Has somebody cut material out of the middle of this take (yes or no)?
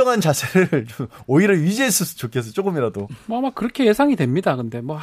no